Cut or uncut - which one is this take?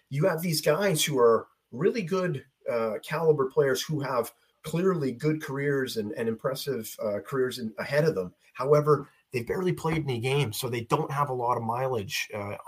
uncut